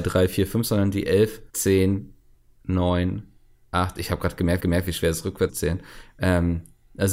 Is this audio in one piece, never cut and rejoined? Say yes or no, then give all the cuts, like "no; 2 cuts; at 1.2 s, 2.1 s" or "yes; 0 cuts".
no; 3 cuts; at 1.5 s, 4.6 s, 5.5 s